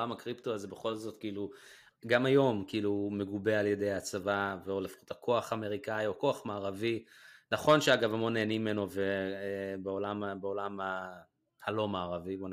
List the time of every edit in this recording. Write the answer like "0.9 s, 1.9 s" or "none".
none